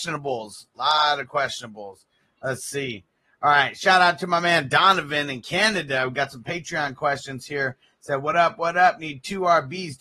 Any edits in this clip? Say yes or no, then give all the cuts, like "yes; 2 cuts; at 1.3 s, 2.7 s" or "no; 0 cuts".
no; 0 cuts